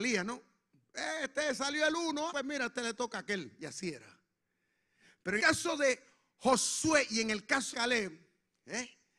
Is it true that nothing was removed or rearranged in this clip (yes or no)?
no